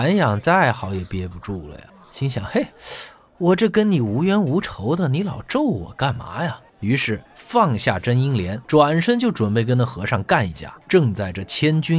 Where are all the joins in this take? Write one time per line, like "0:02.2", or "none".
0:01.9
0:06.7
0:07.3
0:08.6
0:10.8